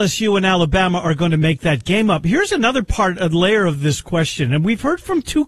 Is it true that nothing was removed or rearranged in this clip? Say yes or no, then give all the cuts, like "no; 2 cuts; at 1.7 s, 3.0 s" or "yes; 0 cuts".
yes; 0 cuts